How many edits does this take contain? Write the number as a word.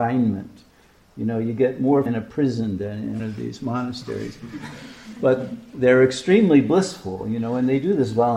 two